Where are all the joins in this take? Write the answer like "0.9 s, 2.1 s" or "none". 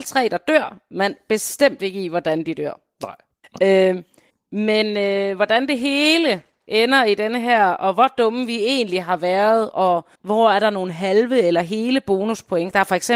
3.4 s, 4.3 s, 10.1 s